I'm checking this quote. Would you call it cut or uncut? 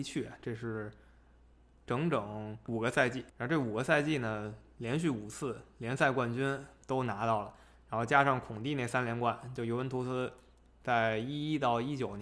uncut